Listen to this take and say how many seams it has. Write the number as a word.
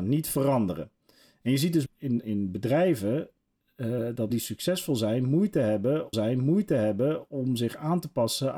four